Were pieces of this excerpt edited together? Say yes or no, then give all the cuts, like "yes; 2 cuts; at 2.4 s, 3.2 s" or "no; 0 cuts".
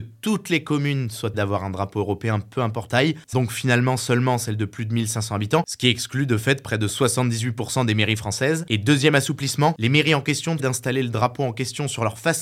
yes; 4 cuts; at 1.3 s, 2.9 s, 3.3 s, 10.6 s